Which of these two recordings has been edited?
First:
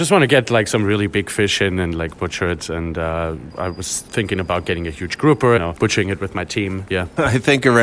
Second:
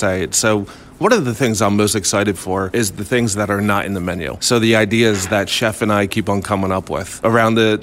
first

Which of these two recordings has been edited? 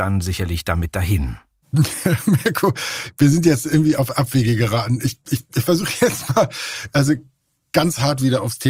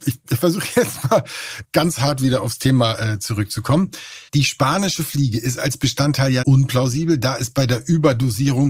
second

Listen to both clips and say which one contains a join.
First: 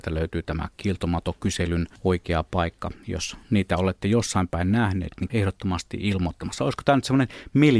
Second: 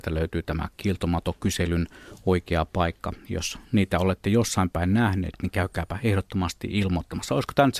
first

